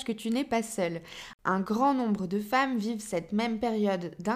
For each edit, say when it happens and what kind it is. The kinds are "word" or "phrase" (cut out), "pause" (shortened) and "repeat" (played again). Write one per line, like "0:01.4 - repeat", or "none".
none